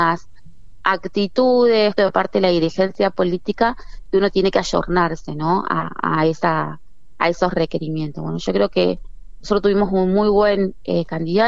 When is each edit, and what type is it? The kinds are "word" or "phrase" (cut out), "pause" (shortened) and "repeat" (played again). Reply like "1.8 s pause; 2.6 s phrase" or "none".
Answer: 2.0 s word